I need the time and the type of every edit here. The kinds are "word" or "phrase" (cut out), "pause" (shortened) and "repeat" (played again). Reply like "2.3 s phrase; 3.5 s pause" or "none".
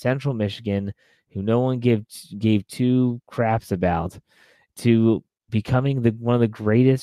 none